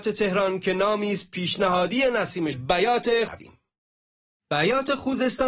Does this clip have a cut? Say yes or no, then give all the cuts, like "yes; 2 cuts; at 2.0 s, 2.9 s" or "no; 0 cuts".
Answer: yes; 2 cuts; at 2.5 s, 3.3 s